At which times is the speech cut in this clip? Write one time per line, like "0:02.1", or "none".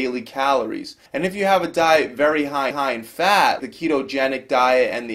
0:01.1
0:02.7
0:03.6